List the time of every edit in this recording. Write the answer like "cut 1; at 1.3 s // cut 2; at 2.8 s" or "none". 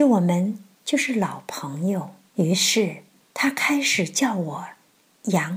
cut 1; at 2.3 s